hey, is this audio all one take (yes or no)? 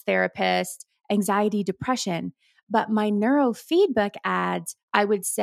yes